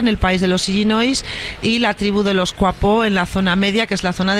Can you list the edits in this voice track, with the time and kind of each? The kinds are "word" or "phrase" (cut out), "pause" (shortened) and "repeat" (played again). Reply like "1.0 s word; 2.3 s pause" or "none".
none